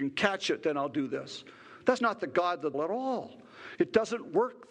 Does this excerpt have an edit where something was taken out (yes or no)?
yes